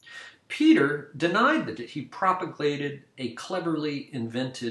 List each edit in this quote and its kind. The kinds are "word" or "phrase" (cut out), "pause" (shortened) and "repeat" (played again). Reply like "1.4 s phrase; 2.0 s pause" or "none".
1.8 s word